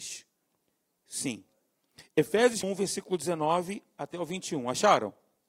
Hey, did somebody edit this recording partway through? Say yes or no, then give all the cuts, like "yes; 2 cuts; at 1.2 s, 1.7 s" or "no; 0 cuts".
yes; 1 cut; at 2.6 s